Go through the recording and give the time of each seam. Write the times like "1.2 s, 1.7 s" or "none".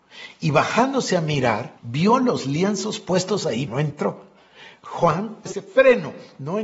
1.8 s, 3.7 s, 5.5 s